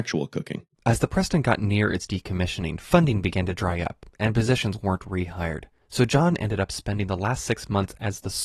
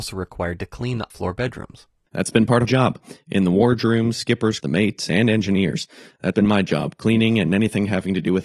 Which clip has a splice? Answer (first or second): second